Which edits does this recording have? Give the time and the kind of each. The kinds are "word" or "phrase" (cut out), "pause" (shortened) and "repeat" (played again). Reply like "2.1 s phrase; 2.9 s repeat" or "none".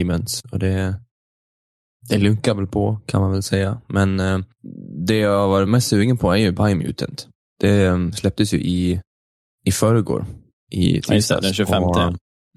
none